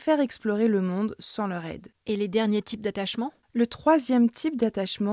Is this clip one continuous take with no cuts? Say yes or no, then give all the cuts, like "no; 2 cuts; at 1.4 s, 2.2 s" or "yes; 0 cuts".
yes; 0 cuts